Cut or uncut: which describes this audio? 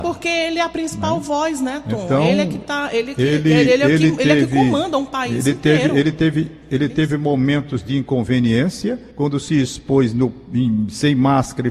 cut